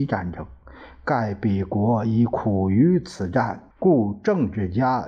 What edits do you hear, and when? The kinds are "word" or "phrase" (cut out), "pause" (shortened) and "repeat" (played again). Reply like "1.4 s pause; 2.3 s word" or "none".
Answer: 3.7 s pause